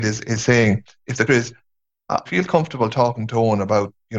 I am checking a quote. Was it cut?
yes; 2 cuts; at 1.3 s, 2.3 s

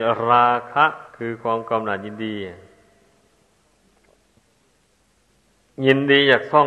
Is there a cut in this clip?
yes; 1 cut; at 1.1 s

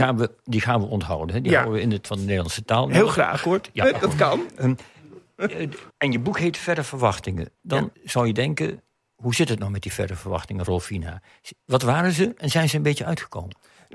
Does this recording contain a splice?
yes; 4 cuts; at 2.0 s, 5.9 s, 7.9 s, 10.7 s

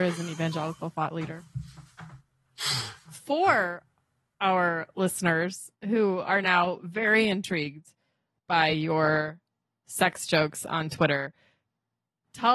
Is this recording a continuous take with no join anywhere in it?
yes; 0 cuts

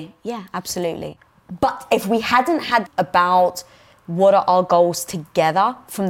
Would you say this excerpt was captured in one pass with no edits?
no; 1 cut; at 2.9 s

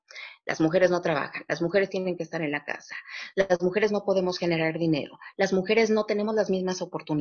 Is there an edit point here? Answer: no; 0 cuts

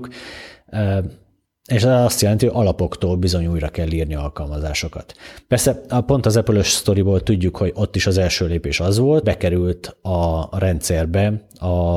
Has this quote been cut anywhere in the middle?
yes; 1 cut; at 9.2 s

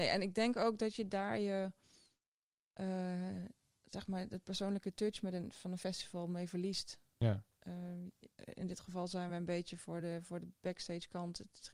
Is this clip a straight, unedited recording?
yes; 0 cuts

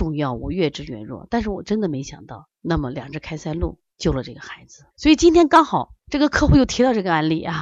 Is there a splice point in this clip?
yes; 4 cuts; at 2.6 s, 3.9 s, 4.9 s, 6.0 s

